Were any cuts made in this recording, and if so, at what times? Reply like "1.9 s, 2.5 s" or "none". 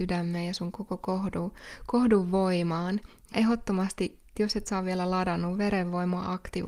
3.3 s, 4.4 s